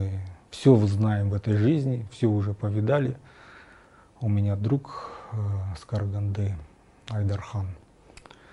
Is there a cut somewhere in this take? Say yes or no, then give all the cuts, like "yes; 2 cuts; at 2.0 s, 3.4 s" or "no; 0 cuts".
no; 0 cuts